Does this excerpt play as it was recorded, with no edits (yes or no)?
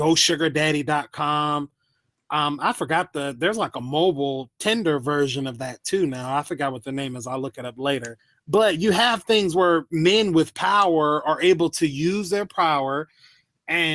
yes